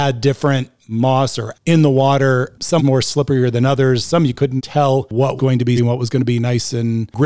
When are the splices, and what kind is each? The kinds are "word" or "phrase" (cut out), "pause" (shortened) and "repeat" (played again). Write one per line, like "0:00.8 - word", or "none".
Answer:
0:01.5 - word
0:02.8 - word
0:04.6 - word
0:05.4 - word
0:05.8 - word